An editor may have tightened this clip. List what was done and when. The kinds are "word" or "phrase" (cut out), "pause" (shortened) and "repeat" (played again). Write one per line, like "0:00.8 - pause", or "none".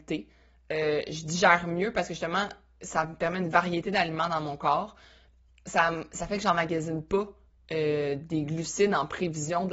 none